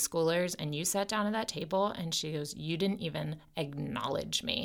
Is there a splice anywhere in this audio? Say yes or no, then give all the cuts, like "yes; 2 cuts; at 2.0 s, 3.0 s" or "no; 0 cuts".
no; 0 cuts